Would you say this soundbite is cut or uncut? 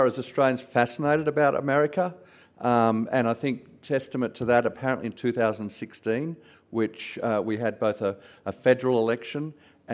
uncut